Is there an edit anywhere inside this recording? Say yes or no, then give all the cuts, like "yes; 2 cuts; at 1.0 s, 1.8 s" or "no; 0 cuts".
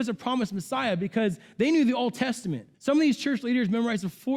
yes; 1 cut; at 2.7 s